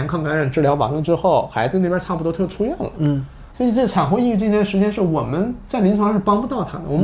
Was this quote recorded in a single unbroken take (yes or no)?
no